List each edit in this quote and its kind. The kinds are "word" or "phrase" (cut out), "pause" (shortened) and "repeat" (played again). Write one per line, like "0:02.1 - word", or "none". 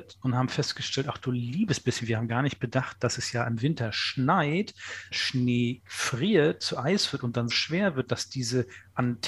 0:05.1 - word
0:07.5 - word